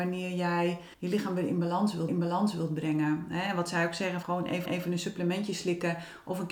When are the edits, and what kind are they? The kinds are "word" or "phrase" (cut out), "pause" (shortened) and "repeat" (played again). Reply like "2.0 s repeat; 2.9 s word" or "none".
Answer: 0.9 s pause; 2.1 s repeat; 4.2 s word; 4.7 s repeat